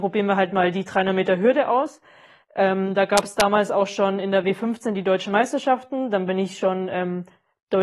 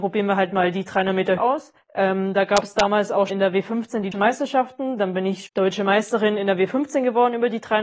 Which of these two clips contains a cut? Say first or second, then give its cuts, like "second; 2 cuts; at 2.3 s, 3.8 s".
second; 5 cuts; at 1.4 s, 1.8 s, 3.3 s, 4.1 s, 5.5 s